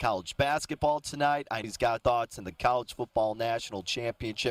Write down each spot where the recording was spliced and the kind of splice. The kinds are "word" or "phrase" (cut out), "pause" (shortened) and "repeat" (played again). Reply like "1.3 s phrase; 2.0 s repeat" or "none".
1.6 s word; 2.0 s word